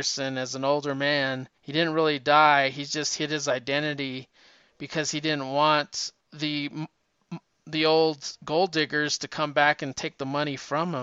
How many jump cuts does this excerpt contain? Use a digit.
2